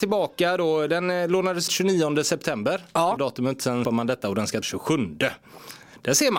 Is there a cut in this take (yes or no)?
yes